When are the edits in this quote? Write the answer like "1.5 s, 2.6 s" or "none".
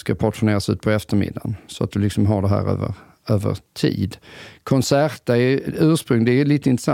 none